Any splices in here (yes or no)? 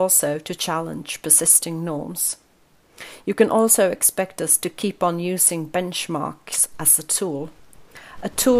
no